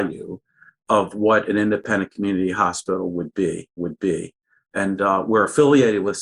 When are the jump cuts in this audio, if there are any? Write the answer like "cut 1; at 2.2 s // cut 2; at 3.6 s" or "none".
cut 1; at 3.8 s